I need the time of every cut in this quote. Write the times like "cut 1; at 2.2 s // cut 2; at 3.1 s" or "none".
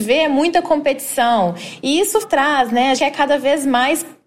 cut 1; at 2.2 s // cut 2; at 3.0 s